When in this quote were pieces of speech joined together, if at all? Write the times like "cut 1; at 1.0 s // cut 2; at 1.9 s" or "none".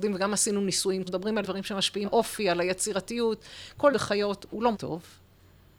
cut 1; at 1.0 s // cut 2; at 1.4 s // cut 3; at 2.0 s // cut 4; at 3.9 s // cut 5; at 4.7 s